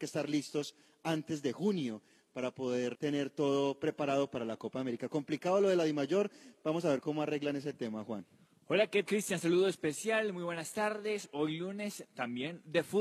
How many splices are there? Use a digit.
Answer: 2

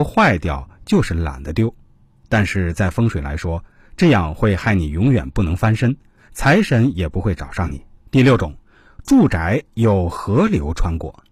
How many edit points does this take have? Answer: 1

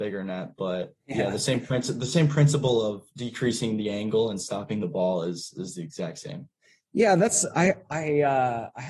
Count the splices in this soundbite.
1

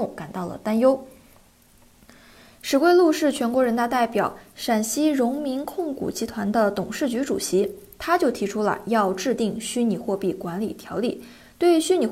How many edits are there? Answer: 0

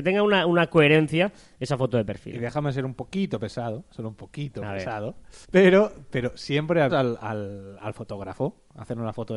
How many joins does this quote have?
2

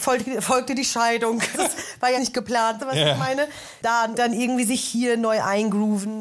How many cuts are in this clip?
4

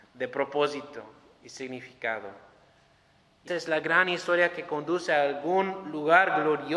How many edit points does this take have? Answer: 1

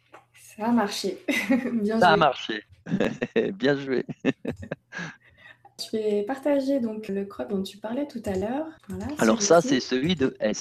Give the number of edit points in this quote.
5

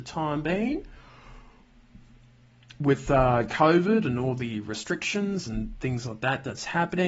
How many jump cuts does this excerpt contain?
0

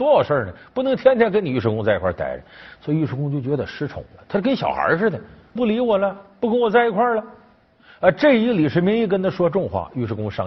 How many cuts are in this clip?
1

